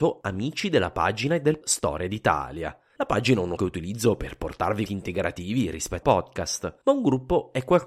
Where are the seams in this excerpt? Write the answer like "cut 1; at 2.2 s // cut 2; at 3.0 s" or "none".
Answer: cut 1; at 1.6 s // cut 2; at 3.6 s // cut 3; at 4.9 s // cut 4; at 6.0 s